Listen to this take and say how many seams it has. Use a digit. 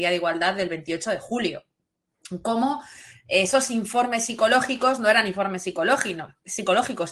0